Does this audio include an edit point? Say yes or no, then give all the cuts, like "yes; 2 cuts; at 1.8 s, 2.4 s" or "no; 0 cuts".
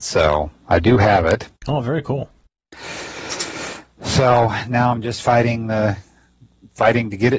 yes; 2 cuts; at 1.6 s, 2.5 s